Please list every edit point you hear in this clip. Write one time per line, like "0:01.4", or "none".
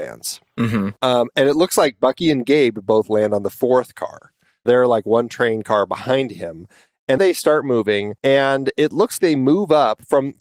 0:01.0
0:04.7
0:07.2
0:08.2
0:09.2